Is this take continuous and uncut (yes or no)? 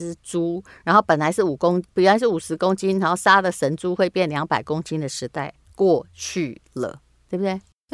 no